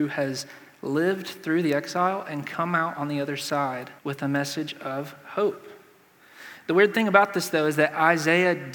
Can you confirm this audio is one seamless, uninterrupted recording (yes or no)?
no